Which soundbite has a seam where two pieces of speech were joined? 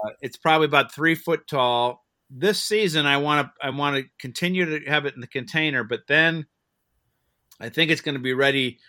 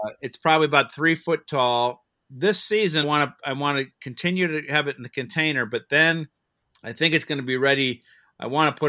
second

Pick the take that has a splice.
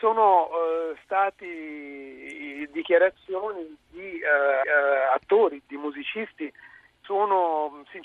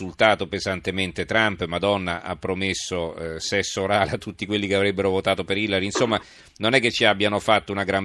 first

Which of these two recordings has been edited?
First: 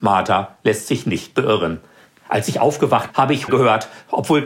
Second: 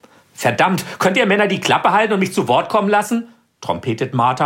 first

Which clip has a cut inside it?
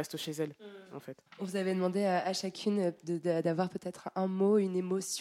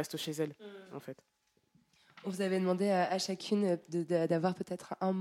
first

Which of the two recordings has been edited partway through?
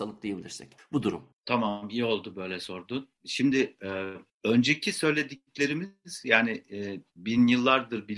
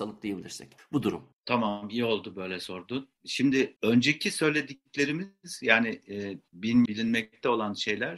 second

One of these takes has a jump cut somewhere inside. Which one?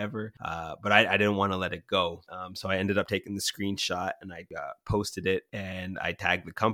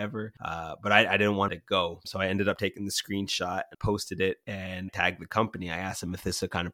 second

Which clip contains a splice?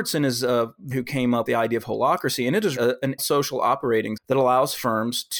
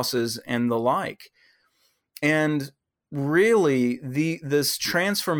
first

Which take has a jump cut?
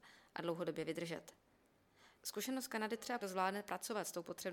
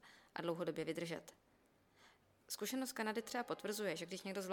first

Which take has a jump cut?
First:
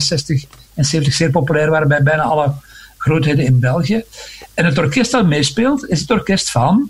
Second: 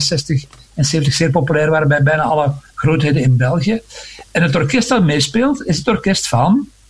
second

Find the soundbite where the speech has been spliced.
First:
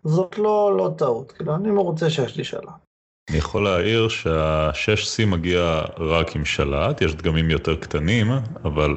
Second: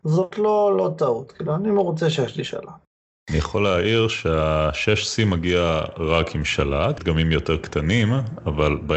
second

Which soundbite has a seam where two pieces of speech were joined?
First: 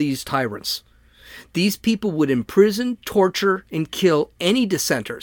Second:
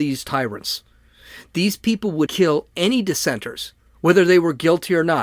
second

